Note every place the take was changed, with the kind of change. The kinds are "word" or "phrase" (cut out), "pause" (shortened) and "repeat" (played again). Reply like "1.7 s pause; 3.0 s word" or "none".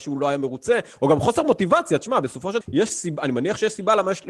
2.6 s word